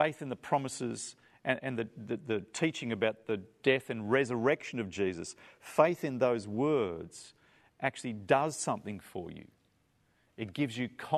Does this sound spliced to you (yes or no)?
no